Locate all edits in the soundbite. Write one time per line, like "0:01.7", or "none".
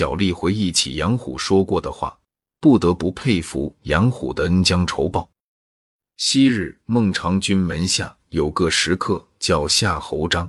none